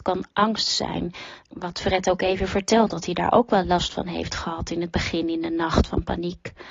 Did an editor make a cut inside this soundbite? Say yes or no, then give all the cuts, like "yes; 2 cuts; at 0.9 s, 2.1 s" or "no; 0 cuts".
no; 0 cuts